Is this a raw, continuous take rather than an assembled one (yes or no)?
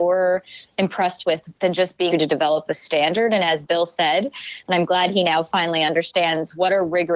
no